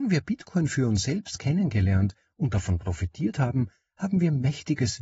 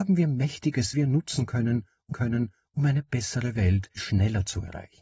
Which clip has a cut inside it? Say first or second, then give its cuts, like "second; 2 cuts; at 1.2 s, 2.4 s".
second; 3 cuts; at 0.9 s, 2.1 s, 4.0 s